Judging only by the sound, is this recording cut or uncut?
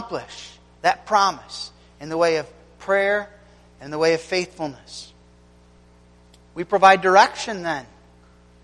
uncut